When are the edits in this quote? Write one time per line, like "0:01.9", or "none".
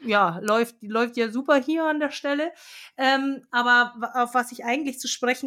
none